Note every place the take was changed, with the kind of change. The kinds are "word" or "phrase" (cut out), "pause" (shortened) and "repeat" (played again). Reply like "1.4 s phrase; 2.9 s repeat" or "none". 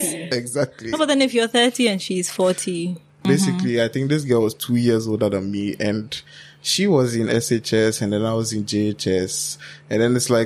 none